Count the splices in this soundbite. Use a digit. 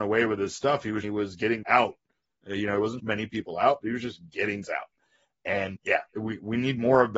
5